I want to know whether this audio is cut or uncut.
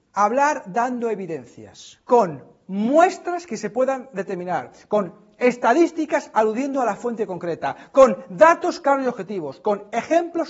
uncut